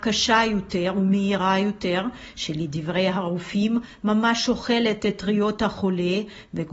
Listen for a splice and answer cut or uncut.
uncut